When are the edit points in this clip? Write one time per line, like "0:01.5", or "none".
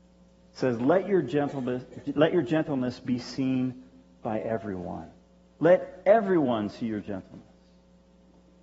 none